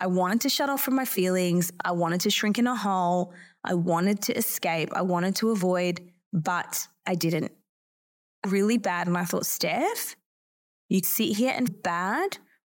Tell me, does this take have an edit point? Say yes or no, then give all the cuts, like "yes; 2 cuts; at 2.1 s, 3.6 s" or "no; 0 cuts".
yes; 3 cuts; at 8.4 s, 11.0 s, 11.7 s